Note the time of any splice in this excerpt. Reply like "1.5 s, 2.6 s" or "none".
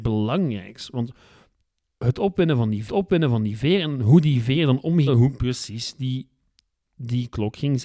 2.9 s, 5.1 s